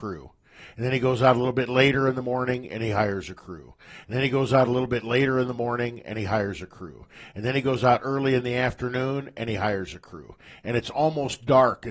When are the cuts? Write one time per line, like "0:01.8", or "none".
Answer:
none